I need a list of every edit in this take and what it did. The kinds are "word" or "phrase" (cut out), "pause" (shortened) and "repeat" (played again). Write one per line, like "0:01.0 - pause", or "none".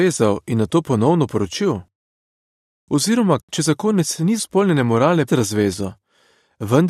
0:03.4 - word
0:04.4 - word
0:05.3 - word